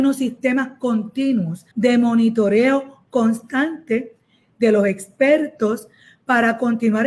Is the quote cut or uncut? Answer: cut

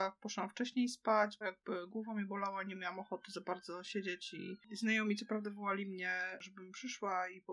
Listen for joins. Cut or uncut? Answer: cut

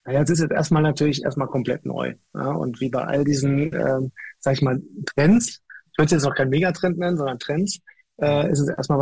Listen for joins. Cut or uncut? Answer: uncut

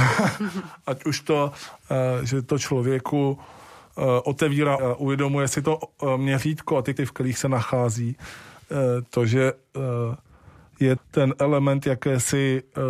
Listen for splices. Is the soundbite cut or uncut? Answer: cut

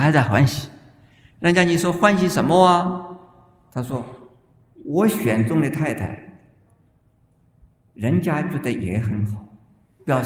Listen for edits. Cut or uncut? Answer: uncut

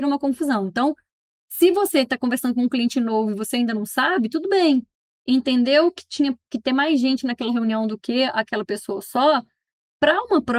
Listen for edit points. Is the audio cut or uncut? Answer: uncut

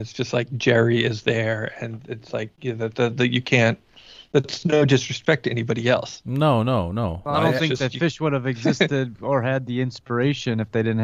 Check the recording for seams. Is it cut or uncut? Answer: uncut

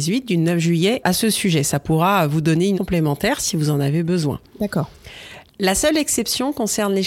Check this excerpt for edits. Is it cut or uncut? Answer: cut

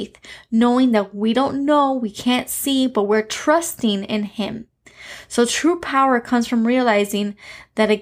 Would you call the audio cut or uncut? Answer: uncut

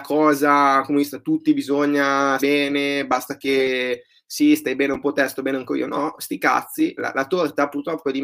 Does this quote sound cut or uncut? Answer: cut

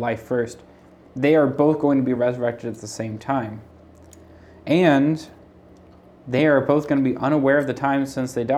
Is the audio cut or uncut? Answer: uncut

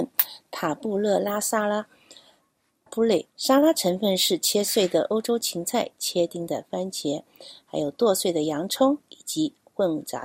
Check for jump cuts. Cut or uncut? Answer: cut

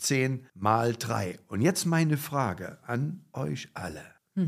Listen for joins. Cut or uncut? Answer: uncut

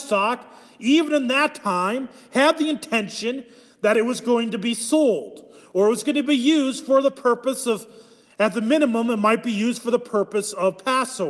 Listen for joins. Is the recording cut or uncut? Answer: uncut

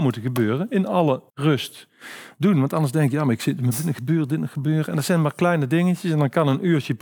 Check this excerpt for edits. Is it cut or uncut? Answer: cut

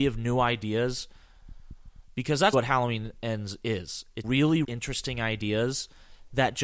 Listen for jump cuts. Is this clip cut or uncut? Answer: cut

